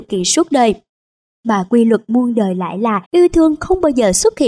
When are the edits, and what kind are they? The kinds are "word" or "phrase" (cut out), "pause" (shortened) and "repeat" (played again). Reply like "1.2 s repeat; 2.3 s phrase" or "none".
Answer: 3.1 s pause